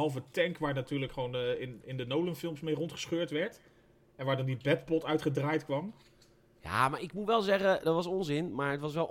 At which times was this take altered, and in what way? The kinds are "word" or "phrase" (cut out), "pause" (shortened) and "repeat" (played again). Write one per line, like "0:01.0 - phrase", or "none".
none